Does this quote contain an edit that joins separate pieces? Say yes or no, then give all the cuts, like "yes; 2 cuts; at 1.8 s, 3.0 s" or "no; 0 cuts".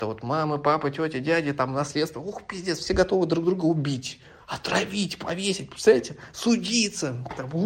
no; 0 cuts